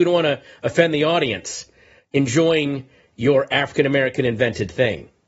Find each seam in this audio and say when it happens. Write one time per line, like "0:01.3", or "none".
none